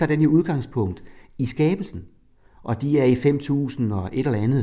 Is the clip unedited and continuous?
yes; 0 cuts

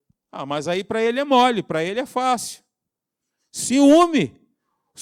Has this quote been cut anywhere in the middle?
no; 0 cuts

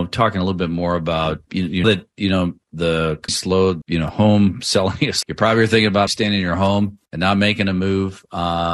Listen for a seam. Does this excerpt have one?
yes; 7 cuts; at 1.5 s, 1.8 s, 3.3 s, 3.8 s, 5.2 s, 6.1 s, 7.1 s

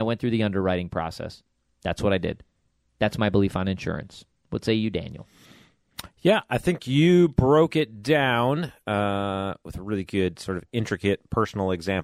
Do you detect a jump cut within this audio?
no; 0 cuts

